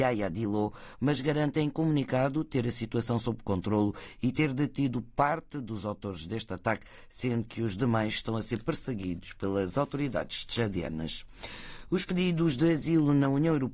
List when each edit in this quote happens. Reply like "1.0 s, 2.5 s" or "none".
none